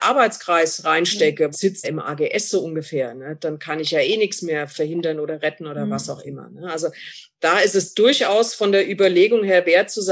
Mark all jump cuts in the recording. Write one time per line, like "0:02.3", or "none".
0:01.5
0:01.8